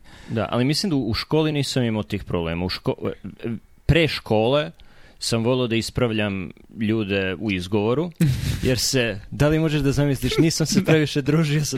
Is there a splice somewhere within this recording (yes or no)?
no